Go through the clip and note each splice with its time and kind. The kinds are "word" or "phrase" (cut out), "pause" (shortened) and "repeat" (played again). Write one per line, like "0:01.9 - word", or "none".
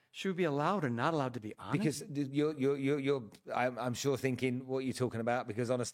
none